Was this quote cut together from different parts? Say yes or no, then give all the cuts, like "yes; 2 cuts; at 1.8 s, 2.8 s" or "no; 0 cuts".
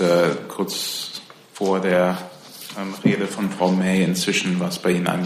no; 0 cuts